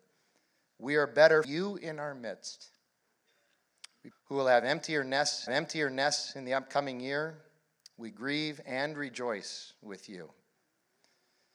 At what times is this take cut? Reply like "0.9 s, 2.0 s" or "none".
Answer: 1.4 s, 4.1 s, 5.5 s